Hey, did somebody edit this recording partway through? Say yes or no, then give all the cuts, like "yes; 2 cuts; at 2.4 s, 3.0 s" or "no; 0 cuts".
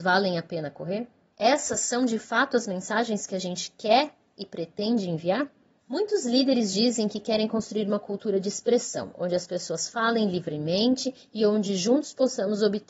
no; 0 cuts